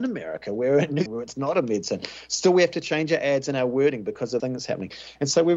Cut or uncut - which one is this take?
cut